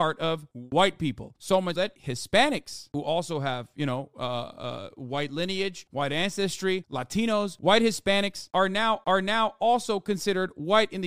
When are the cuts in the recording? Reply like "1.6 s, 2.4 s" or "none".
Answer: 1.8 s, 9.0 s